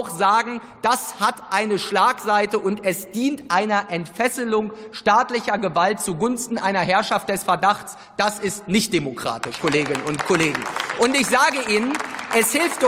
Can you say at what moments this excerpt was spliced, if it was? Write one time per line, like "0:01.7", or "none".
0:09.6